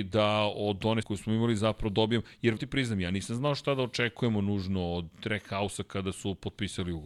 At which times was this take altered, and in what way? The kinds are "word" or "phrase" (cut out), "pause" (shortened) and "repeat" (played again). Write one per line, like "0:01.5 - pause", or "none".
0:01.0 - word
0:02.6 - phrase